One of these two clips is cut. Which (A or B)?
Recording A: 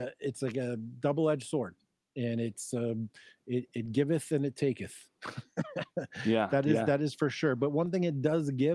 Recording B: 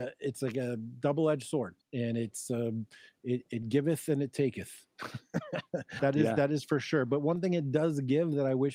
B